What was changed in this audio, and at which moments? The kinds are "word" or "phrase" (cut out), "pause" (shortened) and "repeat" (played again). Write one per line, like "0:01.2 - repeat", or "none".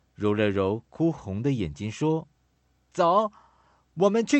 0:02.3 - pause